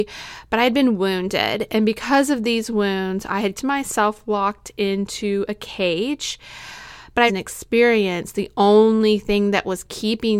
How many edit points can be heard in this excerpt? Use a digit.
2